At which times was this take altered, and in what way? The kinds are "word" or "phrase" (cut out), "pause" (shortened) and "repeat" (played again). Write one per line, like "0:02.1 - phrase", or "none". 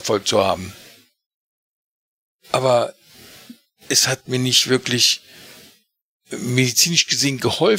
none